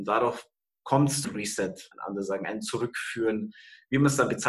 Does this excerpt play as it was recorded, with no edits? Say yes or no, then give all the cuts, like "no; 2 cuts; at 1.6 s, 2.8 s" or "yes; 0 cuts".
no; 2 cuts; at 1.2 s, 1.9 s